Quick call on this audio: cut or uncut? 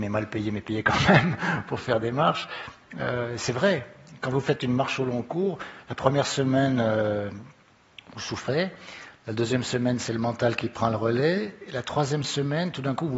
uncut